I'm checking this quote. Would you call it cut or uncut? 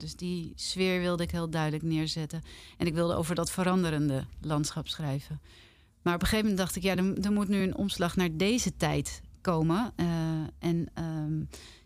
uncut